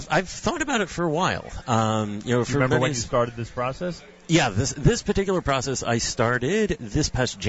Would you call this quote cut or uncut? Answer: uncut